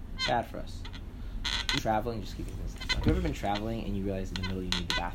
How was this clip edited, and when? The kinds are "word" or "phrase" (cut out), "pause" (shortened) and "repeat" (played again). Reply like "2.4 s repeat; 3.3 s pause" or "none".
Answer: 1.8 s phrase